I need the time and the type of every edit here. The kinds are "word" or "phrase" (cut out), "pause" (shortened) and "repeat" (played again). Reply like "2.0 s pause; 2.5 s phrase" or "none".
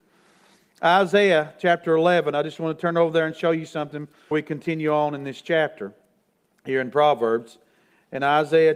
4.3 s word